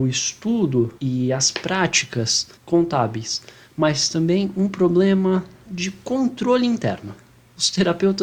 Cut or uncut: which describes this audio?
cut